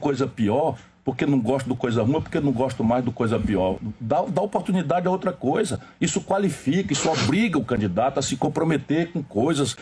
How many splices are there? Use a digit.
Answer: 0